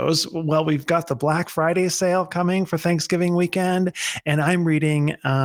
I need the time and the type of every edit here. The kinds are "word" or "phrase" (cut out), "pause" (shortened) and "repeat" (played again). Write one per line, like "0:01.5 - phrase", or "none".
none